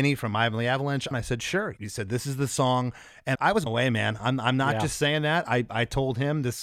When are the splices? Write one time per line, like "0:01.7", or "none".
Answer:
0:01.1
0:01.8
0:03.3
0:03.7